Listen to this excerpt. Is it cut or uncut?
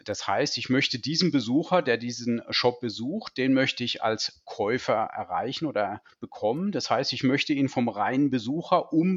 uncut